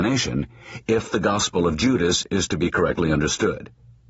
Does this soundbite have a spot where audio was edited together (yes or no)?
no